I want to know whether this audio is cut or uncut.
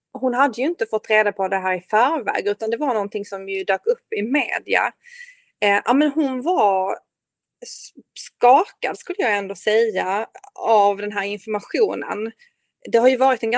uncut